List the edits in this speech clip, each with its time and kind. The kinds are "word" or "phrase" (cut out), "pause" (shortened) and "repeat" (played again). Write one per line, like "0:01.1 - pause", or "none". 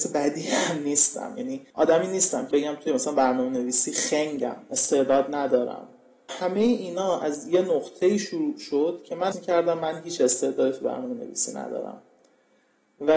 0:01.7 - pause
0:02.5 - word
0:06.3 - phrase
0:09.3 - word